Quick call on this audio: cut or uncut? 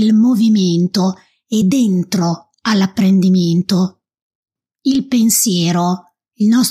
uncut